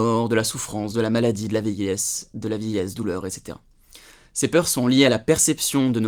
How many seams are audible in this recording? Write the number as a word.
one